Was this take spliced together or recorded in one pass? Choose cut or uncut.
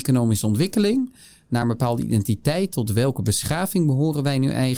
uncut